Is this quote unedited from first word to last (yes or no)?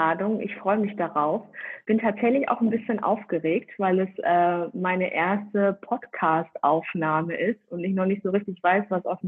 yes